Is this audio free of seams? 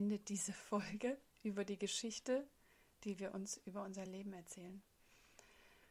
yes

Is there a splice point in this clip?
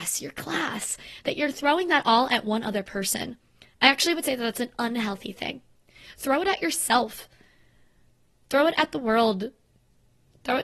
no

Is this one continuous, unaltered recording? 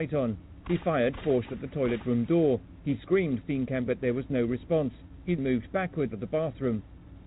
no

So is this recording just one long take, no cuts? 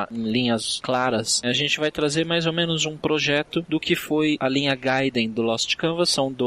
yes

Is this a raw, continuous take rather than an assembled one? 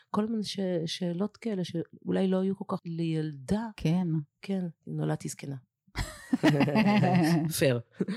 no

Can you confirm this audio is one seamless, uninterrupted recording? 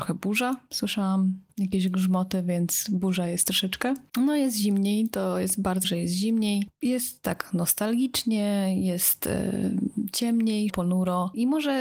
no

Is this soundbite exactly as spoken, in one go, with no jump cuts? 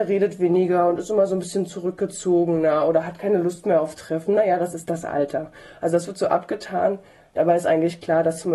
yes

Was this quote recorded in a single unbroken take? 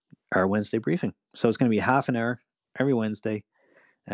yes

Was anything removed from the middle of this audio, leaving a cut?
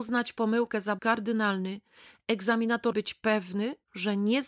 yes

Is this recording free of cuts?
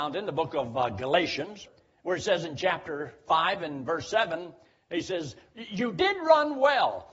yes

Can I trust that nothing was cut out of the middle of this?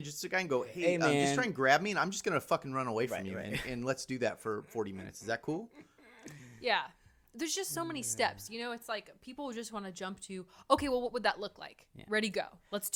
yes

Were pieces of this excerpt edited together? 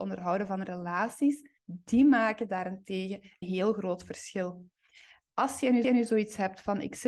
yes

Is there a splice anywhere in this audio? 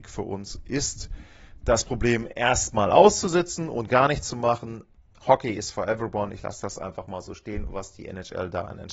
no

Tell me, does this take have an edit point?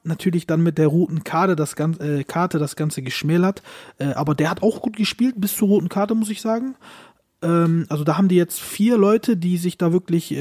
no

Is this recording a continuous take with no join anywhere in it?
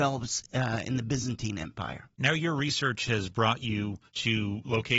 no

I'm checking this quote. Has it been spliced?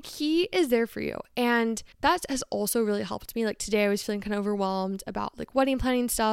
yes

